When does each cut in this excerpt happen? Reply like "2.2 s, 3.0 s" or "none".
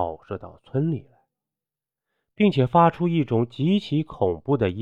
none

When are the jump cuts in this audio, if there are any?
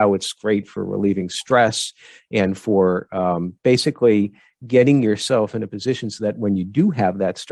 3.6 s

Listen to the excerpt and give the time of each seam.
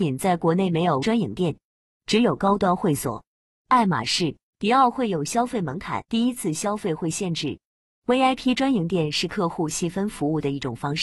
1.0 s, 4.5 s, 6.1 s

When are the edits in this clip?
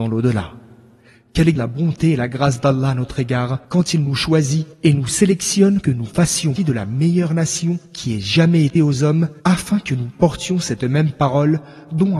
1.6 s, 3.6 s, 4.7 s, 5.8 s, 6.6 s, 7.9 s, 8.8 s, 9.4 s

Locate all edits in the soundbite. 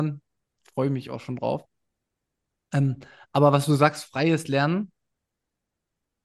none

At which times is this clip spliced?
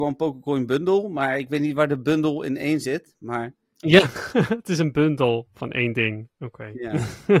none

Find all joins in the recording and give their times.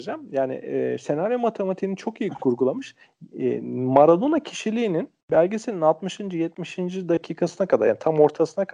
none

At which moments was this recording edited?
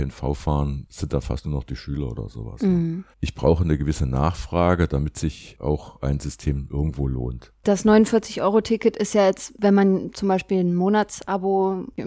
3.1 s

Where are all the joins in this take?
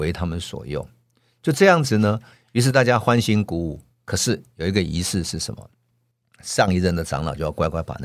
none

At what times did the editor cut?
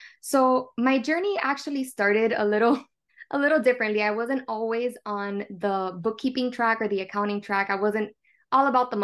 none

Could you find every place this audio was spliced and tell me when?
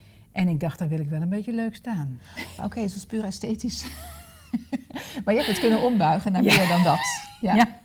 2.6 s

